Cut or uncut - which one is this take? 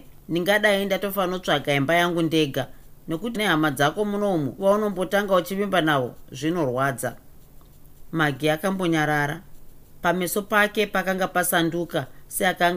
cut